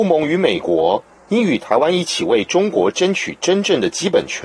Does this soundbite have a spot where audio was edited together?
no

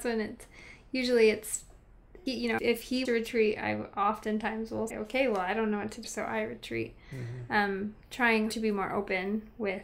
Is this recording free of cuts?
no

